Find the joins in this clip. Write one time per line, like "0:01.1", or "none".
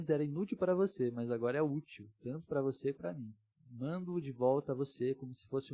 0:03.0
0:03.5